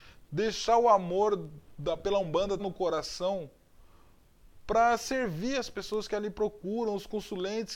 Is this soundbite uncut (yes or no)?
no